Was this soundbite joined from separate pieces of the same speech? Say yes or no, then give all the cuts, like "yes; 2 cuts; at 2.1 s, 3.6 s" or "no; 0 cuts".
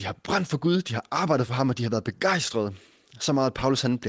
no; 0 cuts